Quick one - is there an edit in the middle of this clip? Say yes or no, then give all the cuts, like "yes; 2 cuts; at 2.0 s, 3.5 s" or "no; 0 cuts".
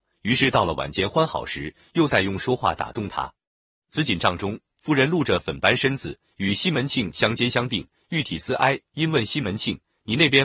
no; 0 cuts